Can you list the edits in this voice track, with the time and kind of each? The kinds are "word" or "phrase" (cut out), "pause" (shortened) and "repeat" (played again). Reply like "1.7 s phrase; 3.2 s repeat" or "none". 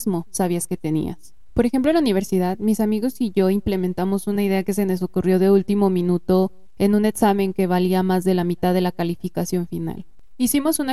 none

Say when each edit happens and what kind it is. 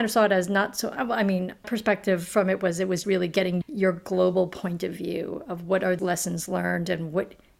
1.6 s word; 3.0 s word; 3.6 s word; 6.0 s word

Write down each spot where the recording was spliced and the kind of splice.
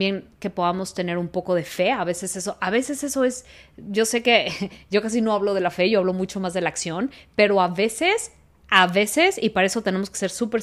none

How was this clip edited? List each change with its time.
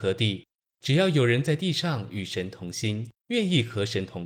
3.2 s pause

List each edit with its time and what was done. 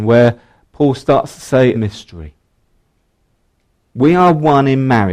1.7 s phrase

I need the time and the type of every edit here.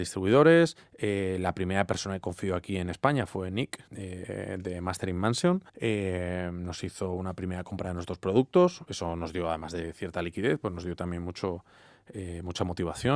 3.9 s pause; 5.7 s pause

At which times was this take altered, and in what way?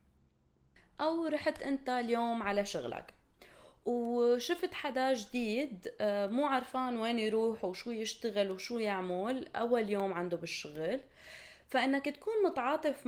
none

